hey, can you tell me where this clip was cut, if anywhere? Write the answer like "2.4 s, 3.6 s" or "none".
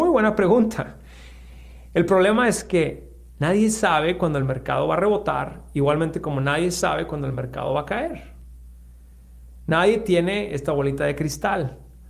none